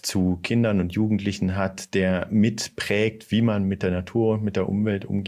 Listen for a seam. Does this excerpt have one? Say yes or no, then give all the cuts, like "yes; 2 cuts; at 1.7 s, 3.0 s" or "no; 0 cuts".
no; 0 cuts